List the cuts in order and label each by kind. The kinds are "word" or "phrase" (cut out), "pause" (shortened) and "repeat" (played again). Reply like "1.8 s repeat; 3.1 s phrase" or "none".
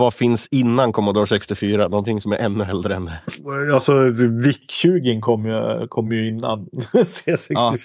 none